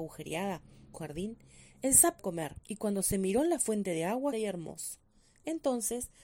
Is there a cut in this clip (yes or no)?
yes